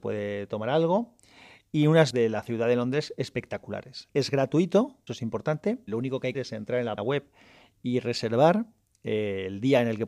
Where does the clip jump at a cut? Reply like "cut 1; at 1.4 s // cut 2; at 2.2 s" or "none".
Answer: cut 1; at 2.1 s // cut 2; at 4.1 s // cut 3; at 5.1 s // cut 4; at 5.9 s // cut 5; at 6.3 s // cut 6; at 7.0 s